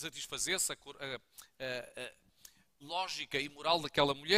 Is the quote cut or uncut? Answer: cut